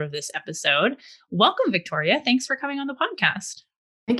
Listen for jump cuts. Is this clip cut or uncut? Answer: uncut